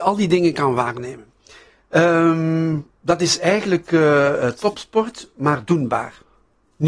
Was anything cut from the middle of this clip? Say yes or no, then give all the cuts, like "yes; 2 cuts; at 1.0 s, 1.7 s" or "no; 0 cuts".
no; 0 cuts